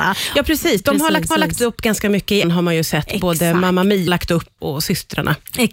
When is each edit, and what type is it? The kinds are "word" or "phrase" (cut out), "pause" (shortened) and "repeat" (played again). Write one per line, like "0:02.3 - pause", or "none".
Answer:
0:01.3 - repeat
0:02.4 - phrase
0:04.1 - word
0:04.6 - word